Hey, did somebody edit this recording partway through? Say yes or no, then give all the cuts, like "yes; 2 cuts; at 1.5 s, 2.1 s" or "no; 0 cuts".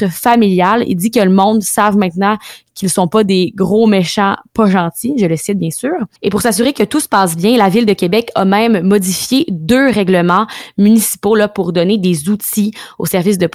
yes; 1 cut; at 6.2 s